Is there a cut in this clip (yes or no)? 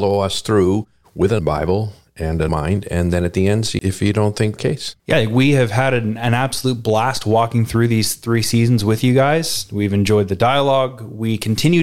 yes